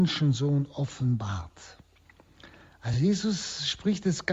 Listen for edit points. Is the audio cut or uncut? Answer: uncut